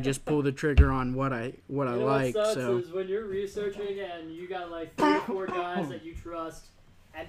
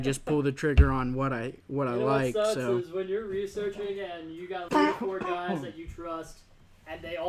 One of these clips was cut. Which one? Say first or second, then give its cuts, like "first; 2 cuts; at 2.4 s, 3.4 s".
second; 1 cut; at 4.7 s